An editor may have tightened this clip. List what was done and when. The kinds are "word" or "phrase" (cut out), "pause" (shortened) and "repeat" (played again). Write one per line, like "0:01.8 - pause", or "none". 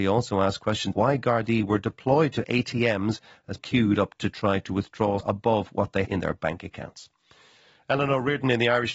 0:00.9 - word
0:03.6 - word
0:05.2 - word
0:06.1 - word